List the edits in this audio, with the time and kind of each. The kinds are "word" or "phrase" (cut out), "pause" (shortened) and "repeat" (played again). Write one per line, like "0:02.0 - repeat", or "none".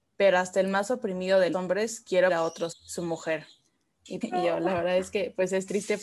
0:01.5 - word
0:02.3 - word
0:02.7 - word
0:04.2 - word